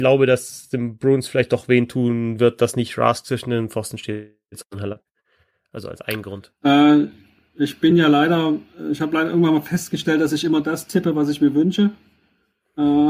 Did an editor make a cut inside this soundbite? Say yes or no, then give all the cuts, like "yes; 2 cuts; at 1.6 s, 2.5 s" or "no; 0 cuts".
no; 0 cuts